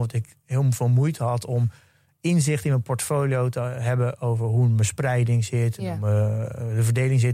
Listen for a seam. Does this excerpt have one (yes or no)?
no